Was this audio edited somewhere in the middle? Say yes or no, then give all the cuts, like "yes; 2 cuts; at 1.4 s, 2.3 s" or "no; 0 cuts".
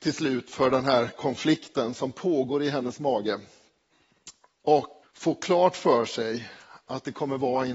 yes; 1 cut; at 5.0 s